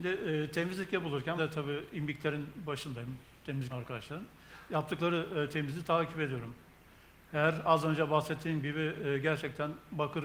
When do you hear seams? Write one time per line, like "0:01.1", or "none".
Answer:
0:01.4
0:03.7